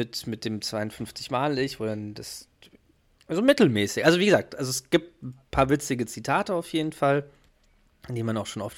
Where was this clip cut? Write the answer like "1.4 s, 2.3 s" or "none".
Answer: none